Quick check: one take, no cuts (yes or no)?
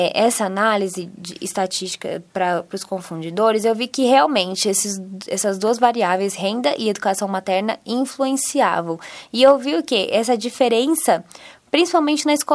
yes